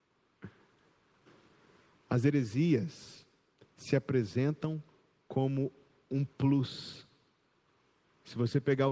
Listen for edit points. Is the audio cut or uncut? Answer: uncut